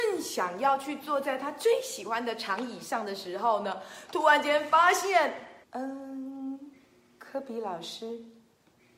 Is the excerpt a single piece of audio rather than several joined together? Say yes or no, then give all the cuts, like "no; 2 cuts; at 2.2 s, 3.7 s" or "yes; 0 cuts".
no; 1 cut; at 5.6 s